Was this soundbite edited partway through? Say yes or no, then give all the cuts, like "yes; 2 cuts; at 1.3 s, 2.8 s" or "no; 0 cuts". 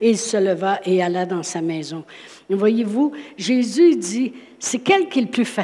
no; 0 cuts